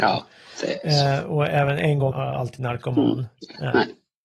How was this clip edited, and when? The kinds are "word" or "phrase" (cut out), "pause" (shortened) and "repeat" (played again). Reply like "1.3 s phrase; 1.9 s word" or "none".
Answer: 2.1 s word